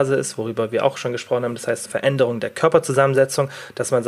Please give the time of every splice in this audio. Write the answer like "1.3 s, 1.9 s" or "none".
1.9 s